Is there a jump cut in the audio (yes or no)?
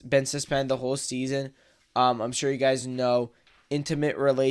no